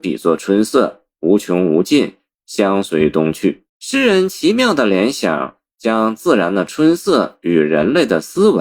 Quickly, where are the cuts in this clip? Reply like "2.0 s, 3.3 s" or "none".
3.7 s